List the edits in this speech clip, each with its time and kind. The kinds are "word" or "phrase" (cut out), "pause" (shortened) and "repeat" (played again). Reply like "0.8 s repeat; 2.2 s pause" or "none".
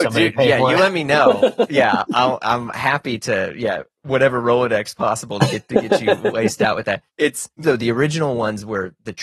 7.1 s pause; 7.6 s word